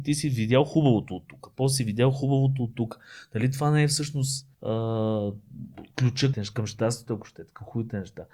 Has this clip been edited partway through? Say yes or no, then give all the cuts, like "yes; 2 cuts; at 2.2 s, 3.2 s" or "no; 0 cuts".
yes; 2 cuts; at 4.5 s, 6.3 s